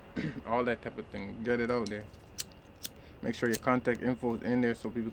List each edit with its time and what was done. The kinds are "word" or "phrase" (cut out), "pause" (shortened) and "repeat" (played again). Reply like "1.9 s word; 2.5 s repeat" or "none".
none